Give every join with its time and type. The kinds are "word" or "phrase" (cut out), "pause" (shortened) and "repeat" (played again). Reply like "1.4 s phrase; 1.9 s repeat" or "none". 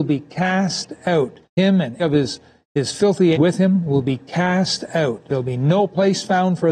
1.4 s pause; 2.0 s word; 3.3 s word